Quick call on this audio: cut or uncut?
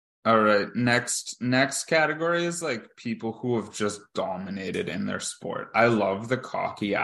uncut